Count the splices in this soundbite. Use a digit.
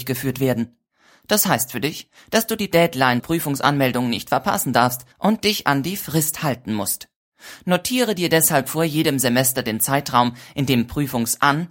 2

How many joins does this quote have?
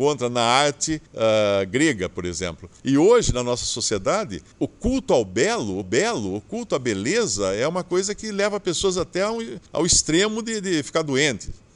5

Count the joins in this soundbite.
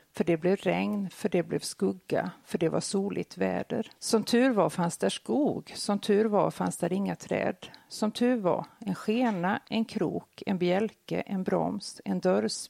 1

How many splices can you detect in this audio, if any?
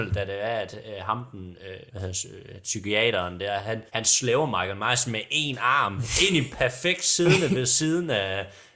3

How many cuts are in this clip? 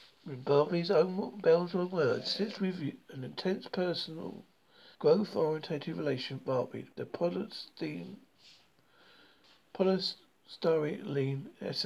3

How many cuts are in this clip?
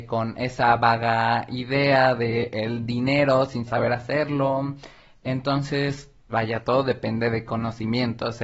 2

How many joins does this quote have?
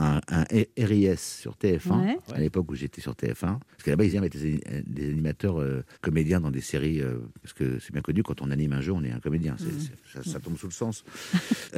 4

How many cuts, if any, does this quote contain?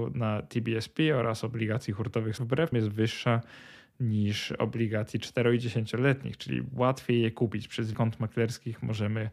3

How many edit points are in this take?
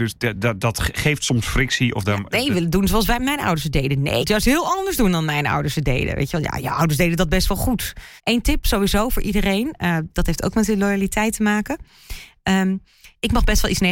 2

